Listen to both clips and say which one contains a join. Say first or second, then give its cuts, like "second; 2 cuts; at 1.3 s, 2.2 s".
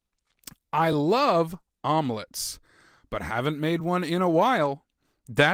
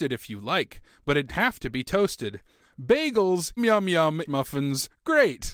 second; 3 cuts; at 1.3 s, 3.6 s, 4.3 s